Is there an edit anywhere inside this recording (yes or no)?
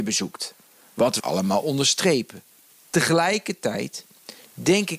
yes